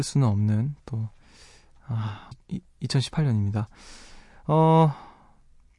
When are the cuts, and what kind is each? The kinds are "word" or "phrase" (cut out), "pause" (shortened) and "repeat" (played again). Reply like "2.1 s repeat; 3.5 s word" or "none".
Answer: 2.3 s word